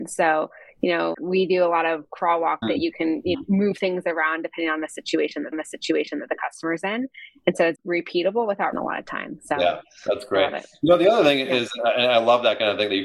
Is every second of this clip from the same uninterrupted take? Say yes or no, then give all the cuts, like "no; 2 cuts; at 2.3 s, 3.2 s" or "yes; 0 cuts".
no; 6 cuts; at 1.1 s, 2.6 s, 3.3 s, 5.5 s, 7.8 s, 8.7 s